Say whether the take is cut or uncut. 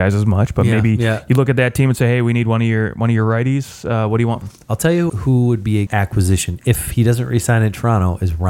cut